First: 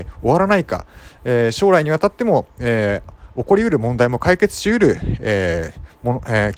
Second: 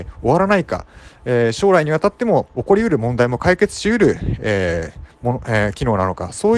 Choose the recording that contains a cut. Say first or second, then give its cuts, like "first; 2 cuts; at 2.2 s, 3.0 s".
second; 1 cut; at 2.5 s